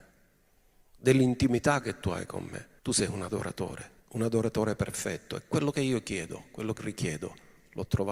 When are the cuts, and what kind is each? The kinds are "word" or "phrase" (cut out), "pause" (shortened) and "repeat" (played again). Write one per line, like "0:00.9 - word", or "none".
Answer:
0:02.8 - pause
0:04.0 - pause
0:06.8 - word

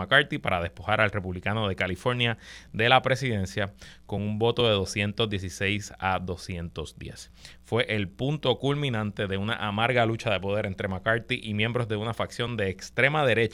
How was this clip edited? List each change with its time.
none

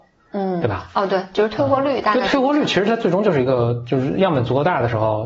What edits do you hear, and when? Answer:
none

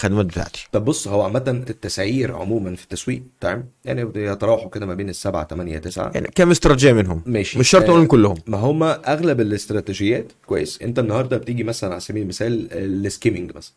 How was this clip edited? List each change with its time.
0:01.7 - word
0:06.3 - phrase
0:10.8 - word

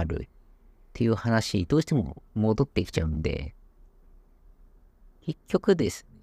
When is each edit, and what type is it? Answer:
none

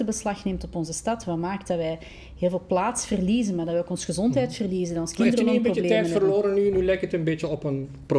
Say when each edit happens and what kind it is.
none

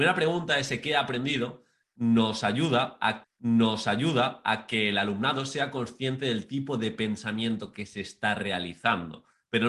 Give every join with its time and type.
0:03.2 - repeat

